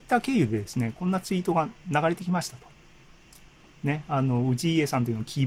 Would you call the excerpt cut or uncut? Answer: uncut